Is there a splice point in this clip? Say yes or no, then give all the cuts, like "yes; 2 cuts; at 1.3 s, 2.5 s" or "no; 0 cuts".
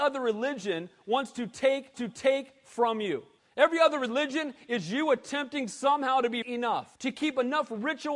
yes; 4 cuts; at 1.9 s, 3.4 s, 6.4 s, 6.9 s